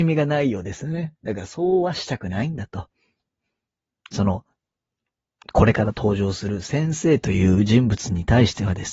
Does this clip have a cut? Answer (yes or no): no